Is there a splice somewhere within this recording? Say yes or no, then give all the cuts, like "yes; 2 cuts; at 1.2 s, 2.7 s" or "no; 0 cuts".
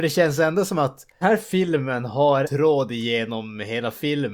yes; 2 cuts; at 1.2 s, 2.4 s